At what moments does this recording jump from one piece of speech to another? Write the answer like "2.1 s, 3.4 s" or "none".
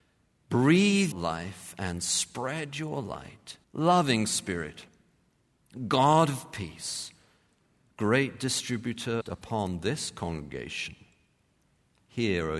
1.1 s, 3.6 s, 9.2 s